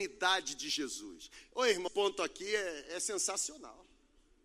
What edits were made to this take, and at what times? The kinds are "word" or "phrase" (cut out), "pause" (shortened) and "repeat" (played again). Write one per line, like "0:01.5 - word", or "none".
0:01.9 - word